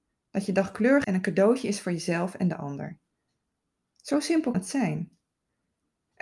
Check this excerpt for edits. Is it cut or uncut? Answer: cut